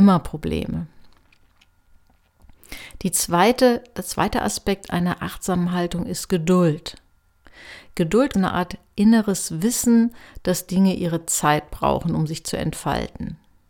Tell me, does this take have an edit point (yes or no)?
yes